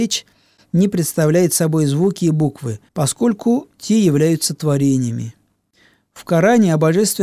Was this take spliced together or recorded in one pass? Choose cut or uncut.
cut